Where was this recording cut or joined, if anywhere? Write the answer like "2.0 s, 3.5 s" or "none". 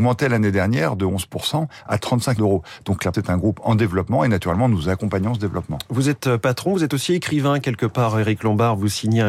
2.4 s, 3.1 s